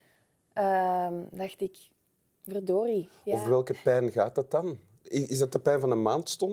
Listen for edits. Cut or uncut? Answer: uncut